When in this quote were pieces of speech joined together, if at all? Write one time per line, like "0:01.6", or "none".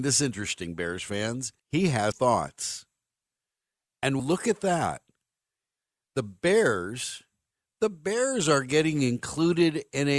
0:01.6
0:02.1
0:04.2